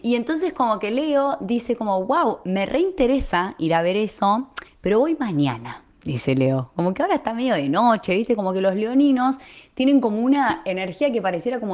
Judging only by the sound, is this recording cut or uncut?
cut